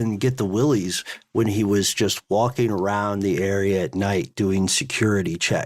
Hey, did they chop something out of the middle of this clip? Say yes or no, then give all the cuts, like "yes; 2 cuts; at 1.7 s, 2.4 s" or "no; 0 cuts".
no; 0 cuts